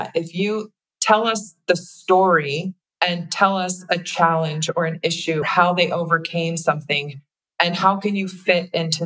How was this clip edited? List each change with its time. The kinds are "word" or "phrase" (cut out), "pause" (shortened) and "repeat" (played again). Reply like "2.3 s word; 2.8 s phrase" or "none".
5.4 s word